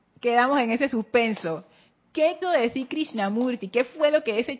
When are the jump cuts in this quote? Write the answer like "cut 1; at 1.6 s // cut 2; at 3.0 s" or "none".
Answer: cut 1; at 2.4 s